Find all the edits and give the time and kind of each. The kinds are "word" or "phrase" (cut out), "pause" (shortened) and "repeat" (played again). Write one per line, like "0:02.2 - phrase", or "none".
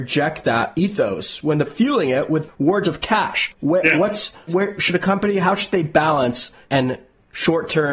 0:01.7 - phrase
0:02.8 - word
0:04.5 - phrase
0:06.7 - word